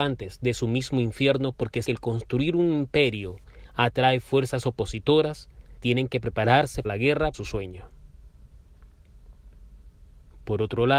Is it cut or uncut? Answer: cut